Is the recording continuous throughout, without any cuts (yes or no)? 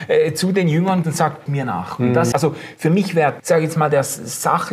no